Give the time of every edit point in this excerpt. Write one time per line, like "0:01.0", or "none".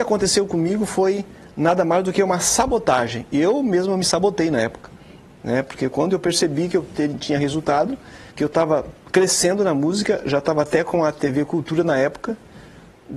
0:08.3